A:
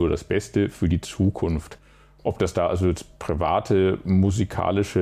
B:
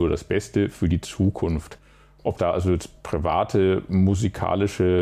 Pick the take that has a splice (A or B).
B